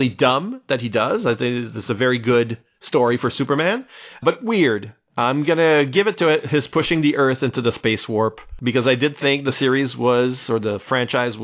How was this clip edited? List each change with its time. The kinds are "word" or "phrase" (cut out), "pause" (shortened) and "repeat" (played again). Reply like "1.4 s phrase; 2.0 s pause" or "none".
none

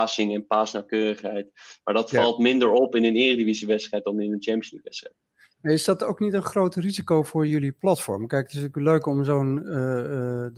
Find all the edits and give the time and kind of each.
none

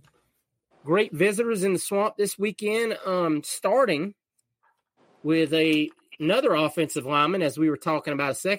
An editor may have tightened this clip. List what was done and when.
none

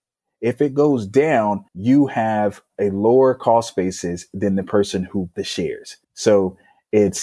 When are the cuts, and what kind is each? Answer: 1.7 s pause; 5.3 s word; 6.0 s pause

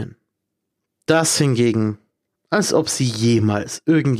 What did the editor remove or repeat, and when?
none

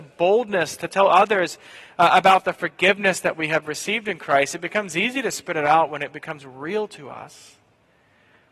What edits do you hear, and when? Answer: none

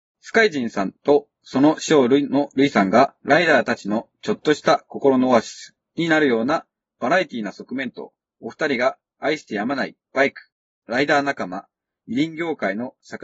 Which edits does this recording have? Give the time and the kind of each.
3.2 s pause; 8.2 s pause; 10.0 s pause

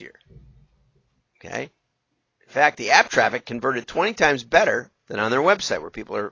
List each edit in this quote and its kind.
5.0 s pause

